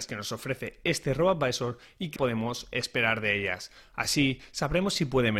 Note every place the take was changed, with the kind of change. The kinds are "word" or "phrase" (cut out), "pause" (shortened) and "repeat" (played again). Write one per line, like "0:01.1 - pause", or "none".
0:02.2 - word